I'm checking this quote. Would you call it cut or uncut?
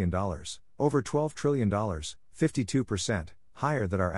uncut